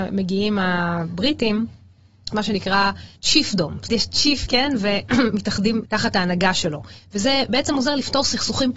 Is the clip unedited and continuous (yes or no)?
no